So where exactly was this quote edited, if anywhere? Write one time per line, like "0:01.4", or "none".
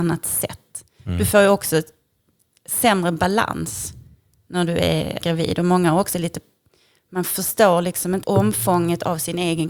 0:05.2
0:08.2